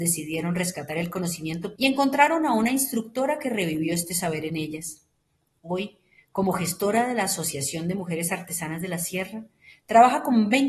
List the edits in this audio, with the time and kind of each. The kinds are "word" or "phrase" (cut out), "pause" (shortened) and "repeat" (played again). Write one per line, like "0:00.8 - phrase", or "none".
0:01.8 - word